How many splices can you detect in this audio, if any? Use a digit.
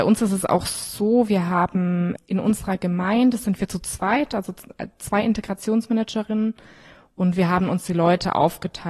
0